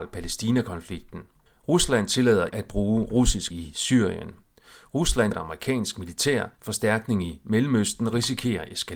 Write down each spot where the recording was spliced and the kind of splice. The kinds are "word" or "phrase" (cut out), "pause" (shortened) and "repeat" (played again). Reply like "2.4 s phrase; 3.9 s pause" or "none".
1.5 s pause; 2.5 s word; 3.5 s word; 5.3 s word; 6.5 s pause